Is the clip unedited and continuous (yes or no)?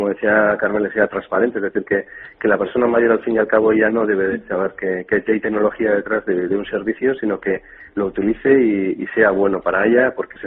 yes